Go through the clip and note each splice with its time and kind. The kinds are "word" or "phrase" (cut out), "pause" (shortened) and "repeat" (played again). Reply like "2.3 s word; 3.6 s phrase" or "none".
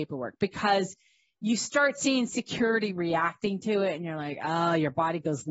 none